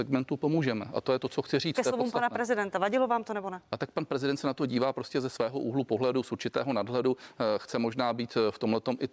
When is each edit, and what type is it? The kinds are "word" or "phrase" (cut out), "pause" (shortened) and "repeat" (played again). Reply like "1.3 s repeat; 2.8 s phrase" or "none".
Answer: none